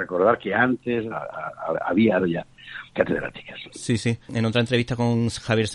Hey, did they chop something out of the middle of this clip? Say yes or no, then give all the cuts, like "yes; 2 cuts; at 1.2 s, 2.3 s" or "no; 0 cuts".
yes; 4 cuts; at 1.1 s, 2.2 s, 2.9 s, 4.2 s